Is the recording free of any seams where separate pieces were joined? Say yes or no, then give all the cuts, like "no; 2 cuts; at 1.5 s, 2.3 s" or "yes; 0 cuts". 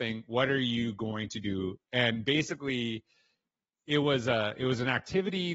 yes; 0 cuts